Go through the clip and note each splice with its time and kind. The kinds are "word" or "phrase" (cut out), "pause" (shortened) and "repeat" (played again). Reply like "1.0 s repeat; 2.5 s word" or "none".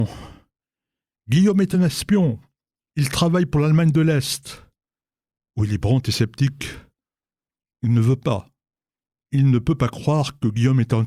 none